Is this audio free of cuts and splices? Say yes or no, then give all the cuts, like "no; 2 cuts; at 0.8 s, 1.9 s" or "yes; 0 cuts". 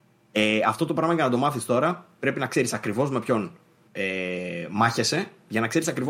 yes; 0 cuts